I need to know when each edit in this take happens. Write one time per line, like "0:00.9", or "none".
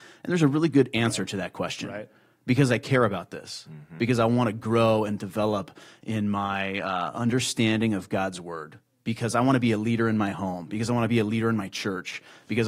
none